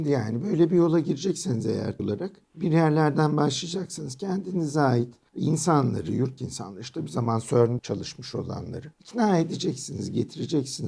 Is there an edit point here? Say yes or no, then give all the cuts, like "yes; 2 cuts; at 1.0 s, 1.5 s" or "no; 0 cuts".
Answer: yes; 3 cuts; at 2.0 s, 6.4 s, 7.8 s